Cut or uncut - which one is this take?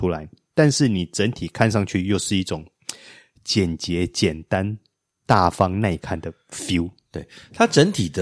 uncut